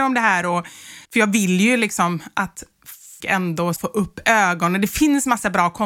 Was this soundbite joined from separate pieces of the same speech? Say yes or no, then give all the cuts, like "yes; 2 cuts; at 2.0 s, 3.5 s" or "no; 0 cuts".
yes; 3 cuts; at 1.1 s, 3.2 s, 3.8 s